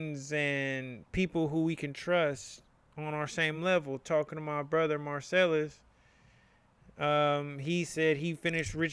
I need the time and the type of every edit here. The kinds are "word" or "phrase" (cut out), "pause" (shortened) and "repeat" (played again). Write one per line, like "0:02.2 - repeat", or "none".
none